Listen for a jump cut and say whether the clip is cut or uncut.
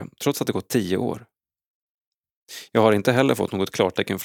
uncut